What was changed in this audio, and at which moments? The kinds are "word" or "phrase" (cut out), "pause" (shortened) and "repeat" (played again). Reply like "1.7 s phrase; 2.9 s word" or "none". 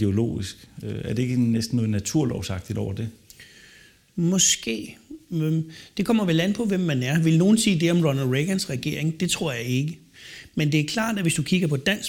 none